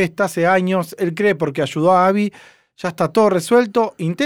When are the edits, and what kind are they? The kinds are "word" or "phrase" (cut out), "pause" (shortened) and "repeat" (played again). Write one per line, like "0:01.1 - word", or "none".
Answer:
none